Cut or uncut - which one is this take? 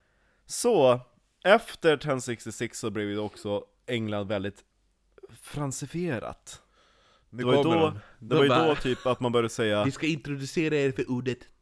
uncut